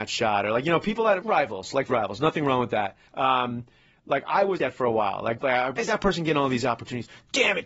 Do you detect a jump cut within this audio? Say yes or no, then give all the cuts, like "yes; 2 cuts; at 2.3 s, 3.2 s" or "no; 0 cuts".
yes; 6 cuts; at 1.2 s, 1.9 s, 3.1 s, 4.6 s, 5.4 s, 5.8 s